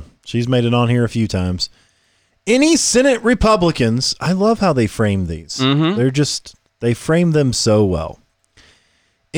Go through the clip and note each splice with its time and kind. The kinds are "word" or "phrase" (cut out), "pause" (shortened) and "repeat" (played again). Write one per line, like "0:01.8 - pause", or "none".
none